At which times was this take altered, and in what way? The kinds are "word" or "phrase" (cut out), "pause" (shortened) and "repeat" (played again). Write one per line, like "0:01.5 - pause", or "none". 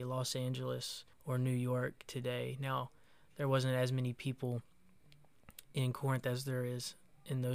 0:01.1 - pause